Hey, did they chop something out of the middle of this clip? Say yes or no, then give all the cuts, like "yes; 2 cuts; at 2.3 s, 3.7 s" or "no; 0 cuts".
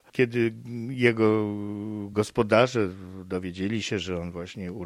no; 0 cuts